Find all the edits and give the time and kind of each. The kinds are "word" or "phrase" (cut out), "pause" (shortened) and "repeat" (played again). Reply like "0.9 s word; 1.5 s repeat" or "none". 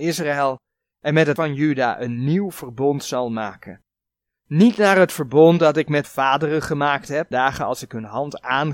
1.4 s word; 6.0 s word; 7.3 s word